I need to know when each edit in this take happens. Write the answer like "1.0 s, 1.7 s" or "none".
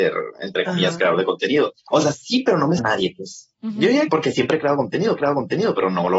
1.8 s, 2.8 s, 4.1 s, 5.2 s